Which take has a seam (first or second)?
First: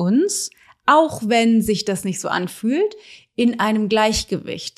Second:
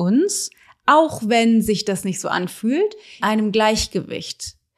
second